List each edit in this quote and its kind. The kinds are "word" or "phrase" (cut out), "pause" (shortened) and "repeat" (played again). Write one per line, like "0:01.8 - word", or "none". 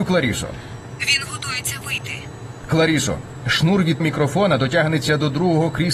0:04.0 - word